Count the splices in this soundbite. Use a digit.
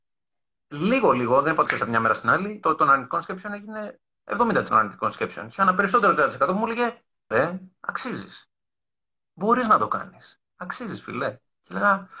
4